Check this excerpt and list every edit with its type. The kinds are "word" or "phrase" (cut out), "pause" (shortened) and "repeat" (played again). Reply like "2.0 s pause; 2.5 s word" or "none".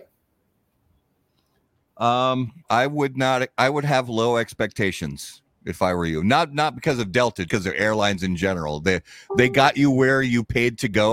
2.6 s pause; 7.5 s word